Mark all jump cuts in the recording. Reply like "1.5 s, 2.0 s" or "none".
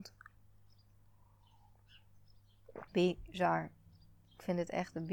2.9 s

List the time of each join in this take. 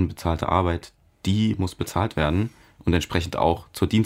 none

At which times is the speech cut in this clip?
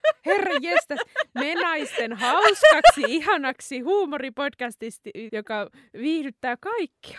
5.3 s

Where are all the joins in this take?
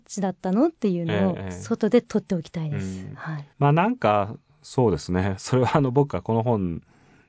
3.5 s

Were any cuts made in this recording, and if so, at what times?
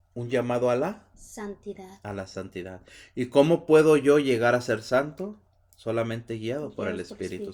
1.1 s

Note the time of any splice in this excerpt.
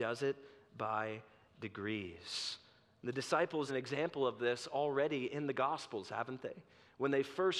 3.7 s

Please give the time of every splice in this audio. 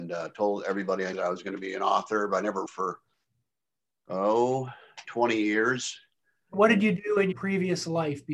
1.1 s, 2.7 s, 6.5 s, 7.3 s

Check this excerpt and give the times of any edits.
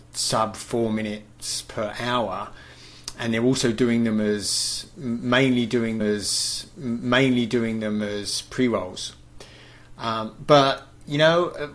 6.0 s

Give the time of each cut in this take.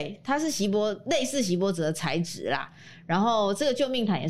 none

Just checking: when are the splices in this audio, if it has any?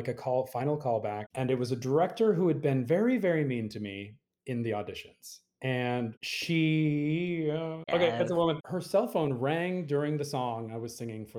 none

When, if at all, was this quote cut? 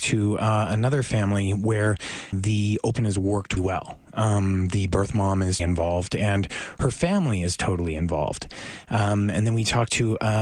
2.3 s, 3.0 s, 3.6 s, 5.6 s

